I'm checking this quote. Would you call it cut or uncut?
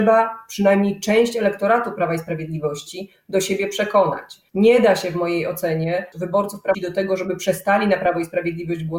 cut